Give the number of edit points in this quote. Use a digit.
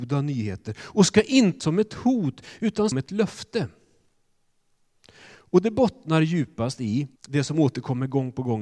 3